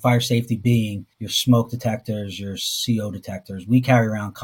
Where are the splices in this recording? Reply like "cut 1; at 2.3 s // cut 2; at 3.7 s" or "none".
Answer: cut 1; at 1.1 s